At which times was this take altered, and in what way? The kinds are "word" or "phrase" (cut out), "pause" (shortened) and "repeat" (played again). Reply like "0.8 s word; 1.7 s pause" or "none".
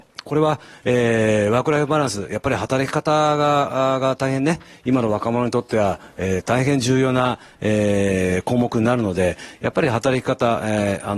none